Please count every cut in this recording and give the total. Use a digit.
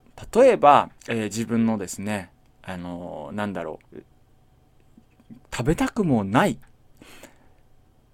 2